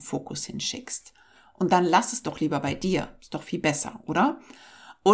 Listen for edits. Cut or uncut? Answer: uncut